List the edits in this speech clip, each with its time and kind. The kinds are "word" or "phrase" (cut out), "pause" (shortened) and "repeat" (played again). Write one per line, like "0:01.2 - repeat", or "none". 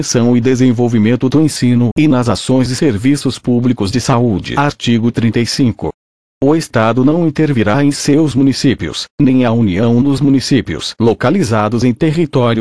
none